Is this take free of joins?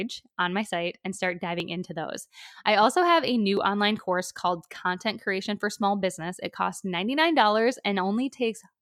yes; 0 cuts

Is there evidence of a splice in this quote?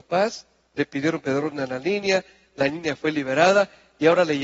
no; 0 cuts

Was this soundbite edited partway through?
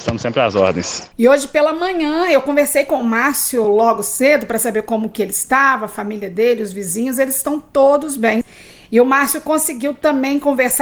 no; 0 cuts

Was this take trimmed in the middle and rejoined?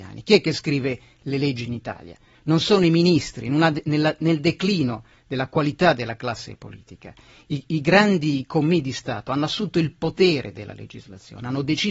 no; 0 cuts

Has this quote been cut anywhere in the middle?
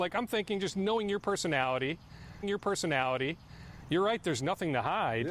yes; 1 cut; at 2.4 s

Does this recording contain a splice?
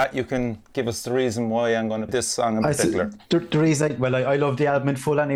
yes; 1 cut; at 2.1 s

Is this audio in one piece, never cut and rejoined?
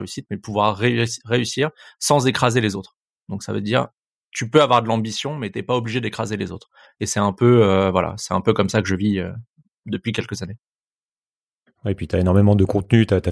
yes; 0 cuts

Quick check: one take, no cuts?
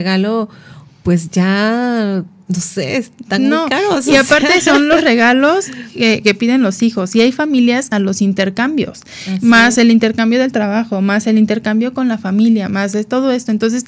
no; 1 cut; at 7.9 s

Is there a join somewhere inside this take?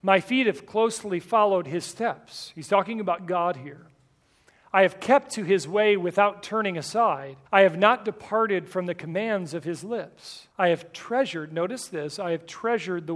yes; 2 cuts; at 7.5 s, 10.5 s

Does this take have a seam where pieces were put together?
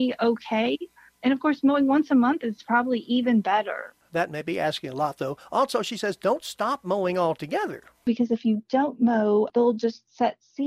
no; 0 cuts

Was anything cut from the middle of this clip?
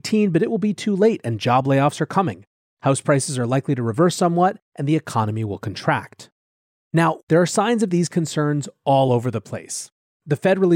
no; 0 cuts

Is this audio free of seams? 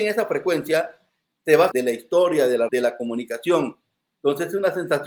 no; 2 cuts; at 1.7 s, 2.7 s

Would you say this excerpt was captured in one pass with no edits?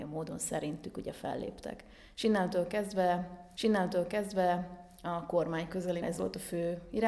no; 2 cuts; at 3.6 s, 6.0 s

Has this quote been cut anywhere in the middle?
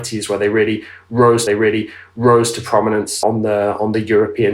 yes; 2 cuts; at 1.5 s, 3.2 s

